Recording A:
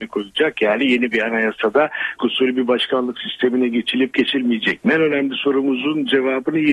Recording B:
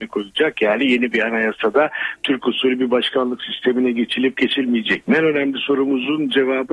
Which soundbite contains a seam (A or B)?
A